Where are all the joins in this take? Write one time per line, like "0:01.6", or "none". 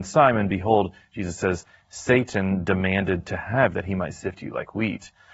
0:03.7